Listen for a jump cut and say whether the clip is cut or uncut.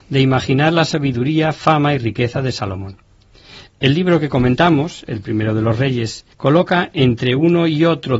cut